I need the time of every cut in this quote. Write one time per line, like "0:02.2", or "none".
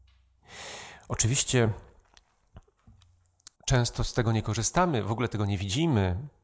0:03.6